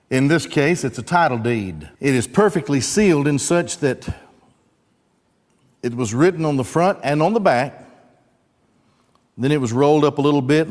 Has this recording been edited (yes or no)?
yes